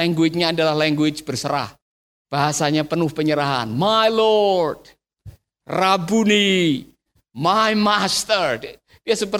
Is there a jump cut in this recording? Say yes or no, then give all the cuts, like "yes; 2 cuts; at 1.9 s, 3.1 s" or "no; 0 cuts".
no; 0 cuts